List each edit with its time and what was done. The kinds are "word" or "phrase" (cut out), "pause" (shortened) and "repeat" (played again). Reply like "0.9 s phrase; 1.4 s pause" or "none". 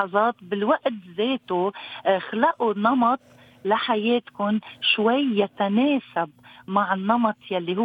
none